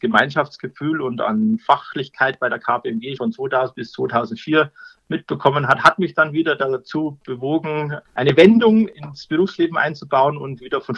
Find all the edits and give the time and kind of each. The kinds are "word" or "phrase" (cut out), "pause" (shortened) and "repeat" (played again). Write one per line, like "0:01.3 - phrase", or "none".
0:03.2 - word